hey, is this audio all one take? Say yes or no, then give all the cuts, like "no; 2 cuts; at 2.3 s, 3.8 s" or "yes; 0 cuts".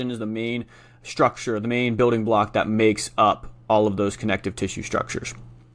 yes; 0 cuts